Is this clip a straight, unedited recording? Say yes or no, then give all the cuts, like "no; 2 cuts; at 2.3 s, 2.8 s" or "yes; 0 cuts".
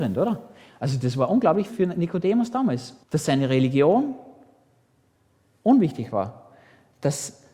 no; 2 cuts; at 1.7 s, 3.0 s